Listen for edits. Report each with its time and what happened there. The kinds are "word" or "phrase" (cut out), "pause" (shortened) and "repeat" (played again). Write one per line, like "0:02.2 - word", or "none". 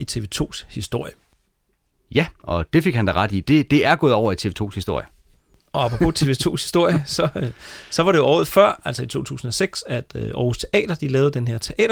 none